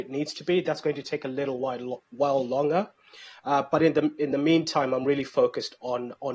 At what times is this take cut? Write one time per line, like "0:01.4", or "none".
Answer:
none